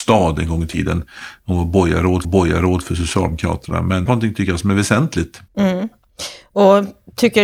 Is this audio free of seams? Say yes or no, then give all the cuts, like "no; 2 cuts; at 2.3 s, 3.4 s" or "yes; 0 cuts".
no; 3 cuts; at 2.2 s, 4.1 s, 5.5 s